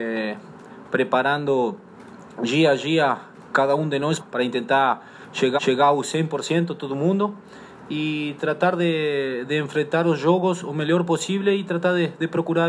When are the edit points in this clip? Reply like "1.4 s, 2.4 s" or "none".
4.2 s, 5.6 s